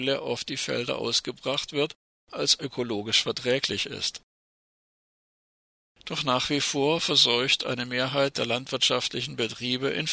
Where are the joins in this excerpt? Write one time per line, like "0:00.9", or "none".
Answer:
none